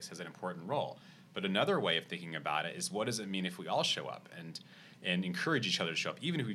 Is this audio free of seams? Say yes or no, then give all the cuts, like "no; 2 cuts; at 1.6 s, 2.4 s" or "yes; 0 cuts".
yes; 0 cuts